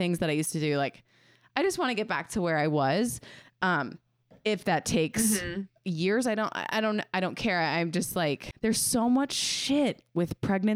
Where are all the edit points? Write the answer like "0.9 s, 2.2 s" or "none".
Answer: 5.8 s